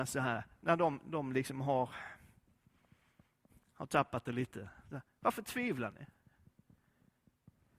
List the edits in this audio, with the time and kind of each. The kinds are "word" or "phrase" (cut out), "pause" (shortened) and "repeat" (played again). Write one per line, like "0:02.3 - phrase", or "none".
none